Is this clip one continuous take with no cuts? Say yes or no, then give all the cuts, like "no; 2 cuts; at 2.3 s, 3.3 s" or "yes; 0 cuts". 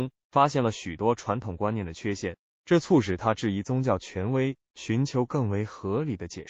yes; 0 cuts